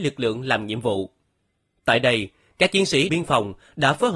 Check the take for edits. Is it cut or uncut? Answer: cut